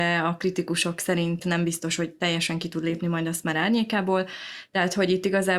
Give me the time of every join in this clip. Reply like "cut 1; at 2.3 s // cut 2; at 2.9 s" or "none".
none